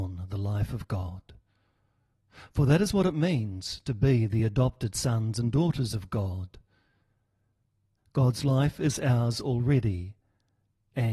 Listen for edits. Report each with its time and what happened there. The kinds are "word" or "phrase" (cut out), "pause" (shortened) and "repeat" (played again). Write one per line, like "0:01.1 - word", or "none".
none